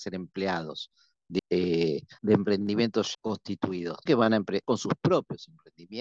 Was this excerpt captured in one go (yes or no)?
no